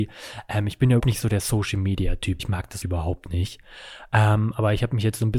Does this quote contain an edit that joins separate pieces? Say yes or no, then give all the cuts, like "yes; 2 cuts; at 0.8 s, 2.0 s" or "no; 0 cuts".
yes; 3 cuts; at 1.0 s, 2.4 s, 2.8 s